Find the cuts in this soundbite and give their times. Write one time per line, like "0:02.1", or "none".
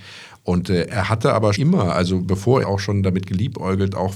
0:01.5
0:02.6